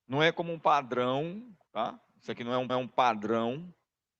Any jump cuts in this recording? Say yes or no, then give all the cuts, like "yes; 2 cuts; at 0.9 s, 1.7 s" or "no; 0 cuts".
yes; 1 cut; at 2.7 s